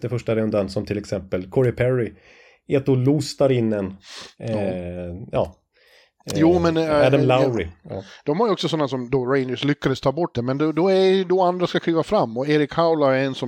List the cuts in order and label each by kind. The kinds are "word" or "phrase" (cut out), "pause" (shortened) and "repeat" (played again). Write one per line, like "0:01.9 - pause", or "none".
0:10.3 - word